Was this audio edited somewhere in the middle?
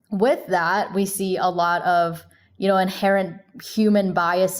no; 0 cuts

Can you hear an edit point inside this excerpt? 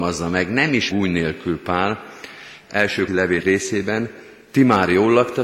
yes; 3 cuts; at 0.9 s, 3.1 s, 3.4 s

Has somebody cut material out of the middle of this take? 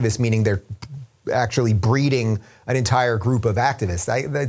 no; 0 cuts

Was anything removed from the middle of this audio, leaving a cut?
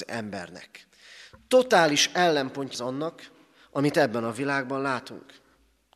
yes; 1 cut; at 2.7 s

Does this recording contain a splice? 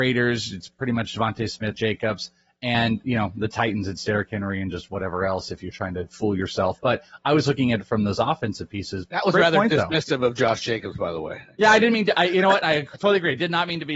yes; 1 cut; at 1.7 s

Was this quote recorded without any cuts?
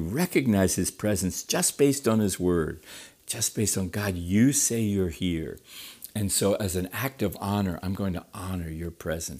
yes; 0 cuts

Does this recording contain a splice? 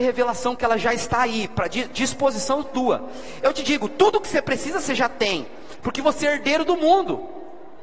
no; 0 cuts

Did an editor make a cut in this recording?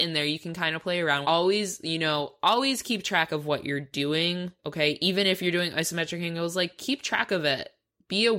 yes; 2 cuts; at 1.2 s, 4.6 s

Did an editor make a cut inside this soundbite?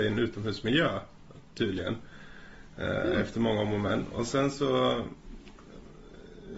no; 0 cuts

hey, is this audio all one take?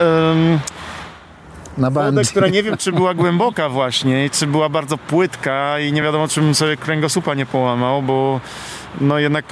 yes; 0 cuts

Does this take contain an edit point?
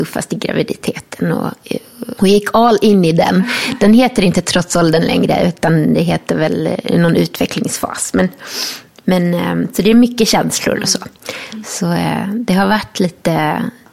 no; 0 cuts

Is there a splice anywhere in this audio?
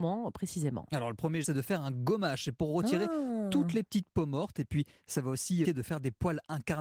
yes; 2 cuts; at 1.4 s, 5.6 s

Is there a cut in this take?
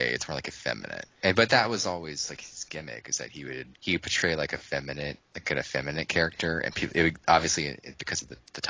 yes; 1 cut; at 3.7 s

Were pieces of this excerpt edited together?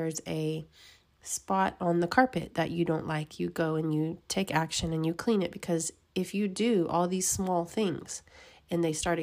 no; 0 cuts

